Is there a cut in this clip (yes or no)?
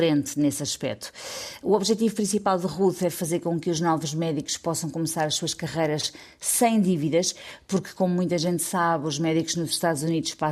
no